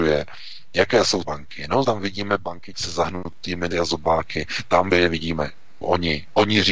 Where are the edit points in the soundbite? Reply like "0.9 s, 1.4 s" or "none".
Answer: 1.2 s, 1.8 s, 2.7 s, 3.7 s, 4.9 s, 5.8 s

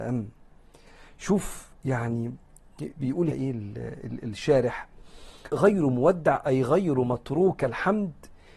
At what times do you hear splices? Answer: 3.3 s, 5.5 s, 7.6 s

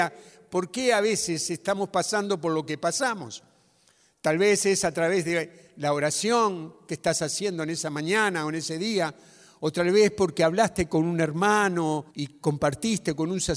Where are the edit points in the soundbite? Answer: 12.1 s

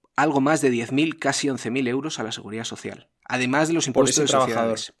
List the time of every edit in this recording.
3.2 s

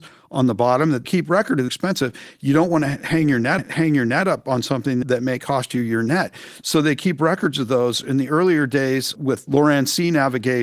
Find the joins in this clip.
1.0 s, 1.7 s, 3.6 s, 5.0 s, 9.2 s

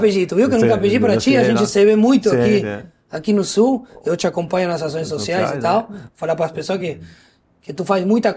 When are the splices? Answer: none

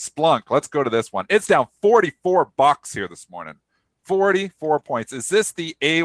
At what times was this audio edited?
none

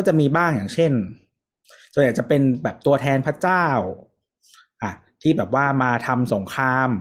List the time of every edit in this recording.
none

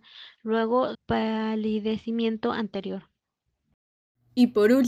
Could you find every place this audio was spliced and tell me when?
0.9 s

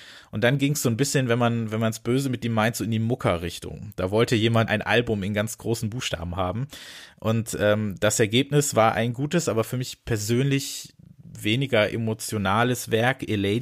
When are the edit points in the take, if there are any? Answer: 4.7 s

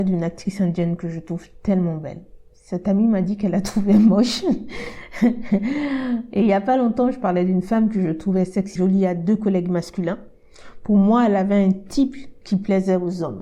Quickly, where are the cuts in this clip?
8.8 s

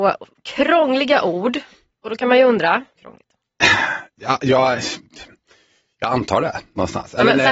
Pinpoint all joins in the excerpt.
3.0 s

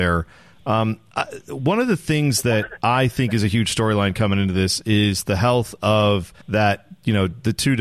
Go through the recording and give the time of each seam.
6.4 s

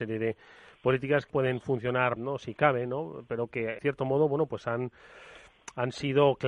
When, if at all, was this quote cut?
1.3 s, 2.2 s, 3.8 s

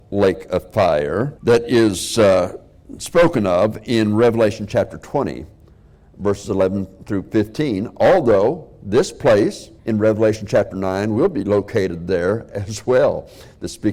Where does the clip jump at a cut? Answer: 1.4 s, 9.8 s

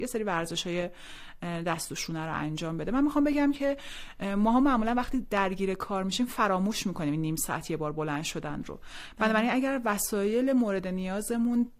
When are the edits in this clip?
none

